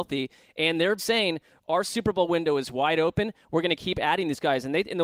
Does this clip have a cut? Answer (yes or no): yes